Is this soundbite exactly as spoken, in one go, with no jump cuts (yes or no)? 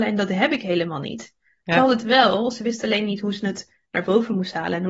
yes